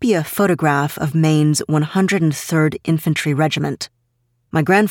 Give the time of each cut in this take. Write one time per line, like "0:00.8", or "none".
none

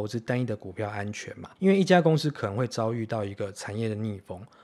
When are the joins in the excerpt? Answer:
0:01.6

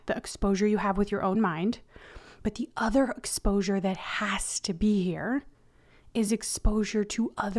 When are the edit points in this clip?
none

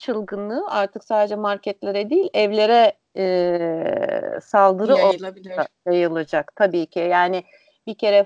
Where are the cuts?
none

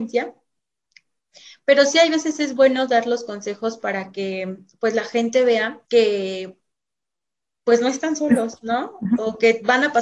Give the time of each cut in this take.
0:05.8

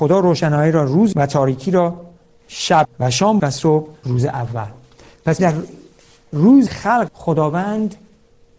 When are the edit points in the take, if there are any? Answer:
0:01.1
0:02.8
0:03.4
0:04.0
0:05.4
0:06.7
0:07.1

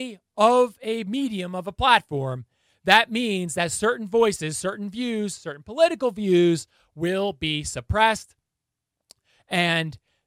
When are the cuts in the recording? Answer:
none

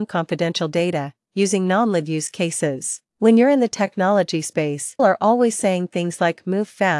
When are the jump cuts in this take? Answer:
0:03.1
0:05.0

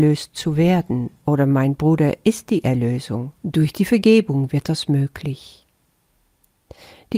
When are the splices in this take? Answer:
0:01.2
0:03.3

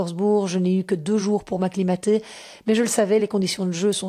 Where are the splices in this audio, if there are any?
none

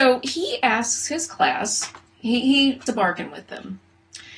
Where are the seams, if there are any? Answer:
0:02.1
0:02.9

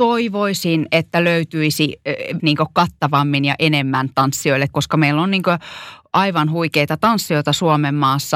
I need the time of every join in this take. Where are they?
0:02.4
0:04.7

